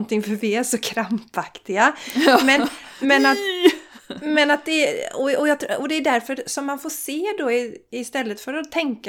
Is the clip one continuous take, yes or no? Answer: yes